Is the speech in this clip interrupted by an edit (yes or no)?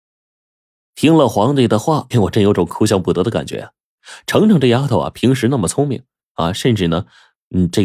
yes